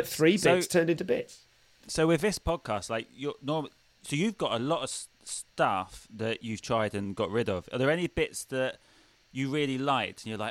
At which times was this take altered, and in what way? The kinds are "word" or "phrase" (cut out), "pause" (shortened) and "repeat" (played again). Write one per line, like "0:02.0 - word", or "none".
none